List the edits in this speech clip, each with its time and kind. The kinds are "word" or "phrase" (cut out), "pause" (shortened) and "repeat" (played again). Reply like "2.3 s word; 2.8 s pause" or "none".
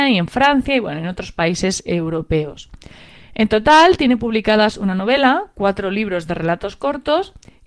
none